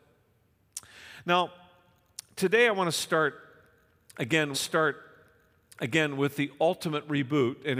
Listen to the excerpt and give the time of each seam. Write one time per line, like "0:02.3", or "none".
0:04.5